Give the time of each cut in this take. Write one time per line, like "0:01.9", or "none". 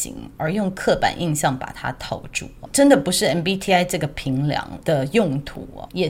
none